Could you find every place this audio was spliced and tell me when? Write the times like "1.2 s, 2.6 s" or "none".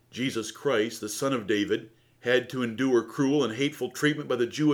2.0 s

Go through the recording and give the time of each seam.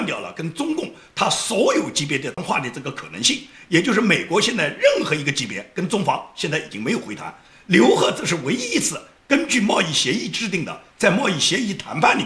none

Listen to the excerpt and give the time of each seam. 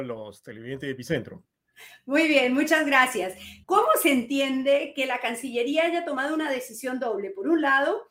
3.6 s

